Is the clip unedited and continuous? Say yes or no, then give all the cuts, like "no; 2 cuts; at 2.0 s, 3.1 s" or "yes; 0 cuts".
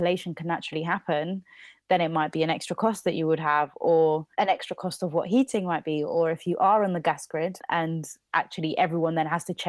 no; 1 cut; at 4.3 s